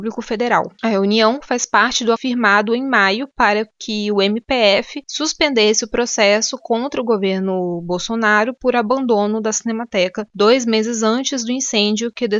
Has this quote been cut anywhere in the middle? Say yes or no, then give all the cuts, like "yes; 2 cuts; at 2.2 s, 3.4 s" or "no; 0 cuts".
yes; 1 cut; at 2.2 s